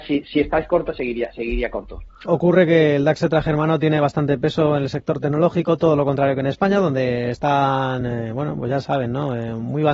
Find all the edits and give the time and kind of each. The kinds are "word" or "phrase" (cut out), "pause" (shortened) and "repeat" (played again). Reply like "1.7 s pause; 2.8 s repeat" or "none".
none